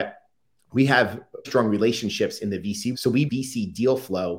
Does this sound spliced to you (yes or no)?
yes